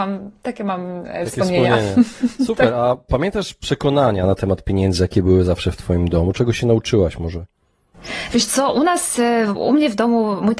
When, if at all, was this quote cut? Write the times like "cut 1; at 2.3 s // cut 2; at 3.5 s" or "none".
none